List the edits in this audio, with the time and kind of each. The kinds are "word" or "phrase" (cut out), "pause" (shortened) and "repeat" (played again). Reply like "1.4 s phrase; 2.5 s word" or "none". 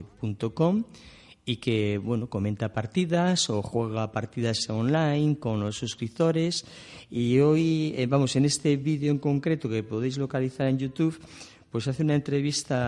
none